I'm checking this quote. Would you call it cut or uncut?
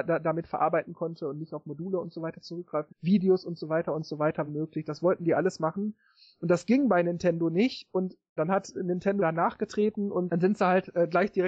cut